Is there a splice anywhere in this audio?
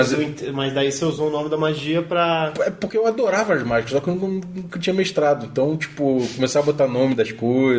no; 0 cuts

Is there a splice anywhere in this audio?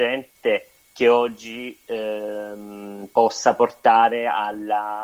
no; 0 cuts

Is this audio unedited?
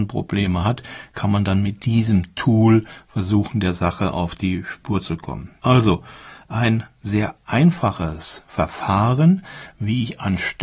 yes; 0 cuts

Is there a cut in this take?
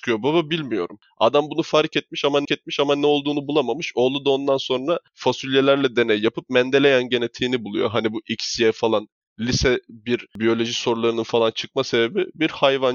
yes; 1 cut; at 2.4 s

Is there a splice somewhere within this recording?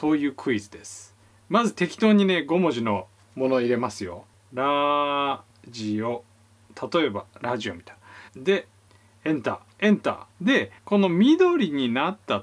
yes; 4 cuts; at 8.3 s, 9.7 s, 10.3 s, 10.8 s

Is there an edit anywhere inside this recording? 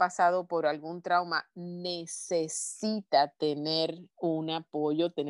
yes; 1 cut; at 4.1 s

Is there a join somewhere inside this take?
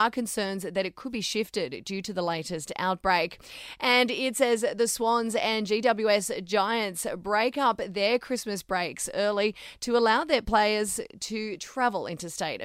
no; 0 cuts

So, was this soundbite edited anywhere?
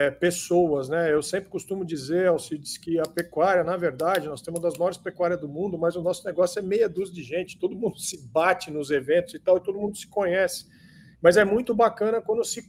no; 0 cuts

